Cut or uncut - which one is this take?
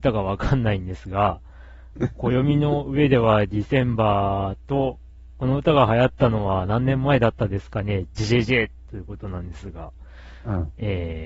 cut